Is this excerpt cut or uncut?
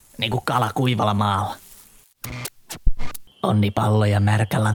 cut